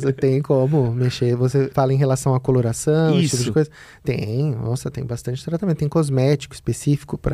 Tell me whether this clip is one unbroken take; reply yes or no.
no